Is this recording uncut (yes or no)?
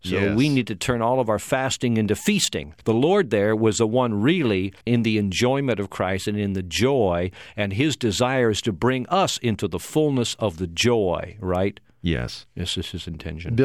no